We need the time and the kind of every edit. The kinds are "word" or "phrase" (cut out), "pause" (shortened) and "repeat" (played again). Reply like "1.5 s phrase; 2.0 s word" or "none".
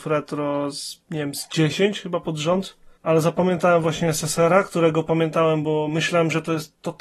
3.0 s pause